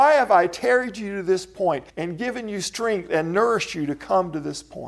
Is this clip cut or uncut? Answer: cut